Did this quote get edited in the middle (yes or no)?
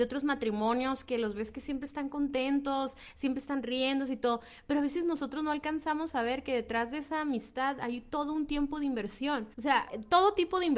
yes